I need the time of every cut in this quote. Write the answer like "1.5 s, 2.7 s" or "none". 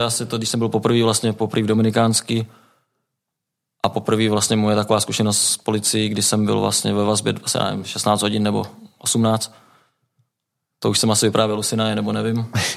none